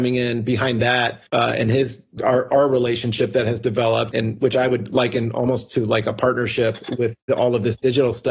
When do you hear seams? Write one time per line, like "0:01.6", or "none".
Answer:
0:01.3
0:02.2
0:04.1